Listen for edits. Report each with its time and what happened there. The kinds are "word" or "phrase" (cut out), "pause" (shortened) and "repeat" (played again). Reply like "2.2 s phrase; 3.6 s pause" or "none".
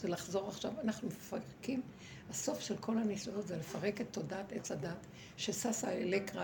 none